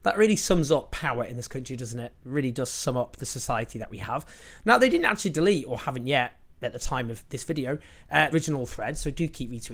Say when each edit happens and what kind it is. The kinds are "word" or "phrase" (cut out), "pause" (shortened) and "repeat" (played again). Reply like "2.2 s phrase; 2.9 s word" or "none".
8.3 s word